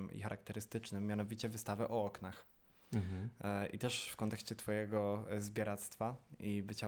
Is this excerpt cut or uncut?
uncut